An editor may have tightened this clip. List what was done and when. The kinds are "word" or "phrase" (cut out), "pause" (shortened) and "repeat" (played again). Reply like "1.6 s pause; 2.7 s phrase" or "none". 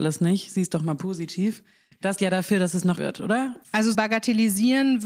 2.2 s word; 3.0 s word; 3.9 s word